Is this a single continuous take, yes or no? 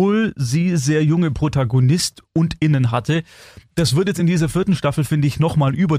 yes